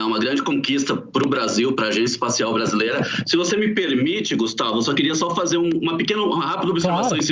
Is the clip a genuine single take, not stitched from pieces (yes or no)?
yes